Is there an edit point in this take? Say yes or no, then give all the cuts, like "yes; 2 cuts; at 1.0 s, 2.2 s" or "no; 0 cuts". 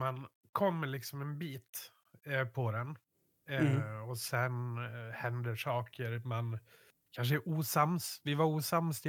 no; 0 cuts